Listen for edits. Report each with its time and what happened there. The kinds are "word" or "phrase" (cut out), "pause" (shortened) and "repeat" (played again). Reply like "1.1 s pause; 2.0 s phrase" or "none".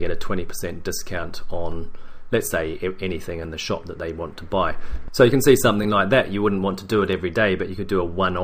none